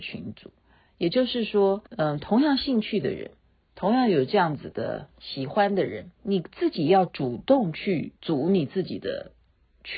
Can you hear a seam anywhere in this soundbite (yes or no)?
yes